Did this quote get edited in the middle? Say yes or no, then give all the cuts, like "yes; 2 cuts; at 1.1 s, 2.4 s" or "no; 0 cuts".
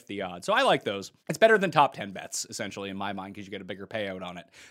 yes; 1 cut; at 1.2 s